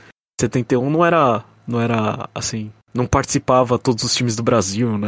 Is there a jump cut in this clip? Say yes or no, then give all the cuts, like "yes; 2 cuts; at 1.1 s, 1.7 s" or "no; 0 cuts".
yes; 1 cut; at 2.8 s